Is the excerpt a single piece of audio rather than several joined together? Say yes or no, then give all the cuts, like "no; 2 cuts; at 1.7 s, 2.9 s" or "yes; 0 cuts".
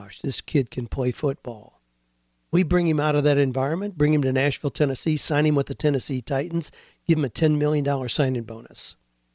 yes; 0 cuts